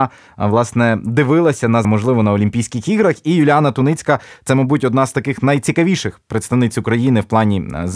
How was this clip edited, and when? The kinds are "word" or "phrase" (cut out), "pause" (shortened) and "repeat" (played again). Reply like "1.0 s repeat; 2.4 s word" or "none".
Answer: 1.8 s word